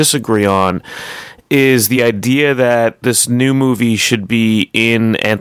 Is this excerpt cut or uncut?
uncut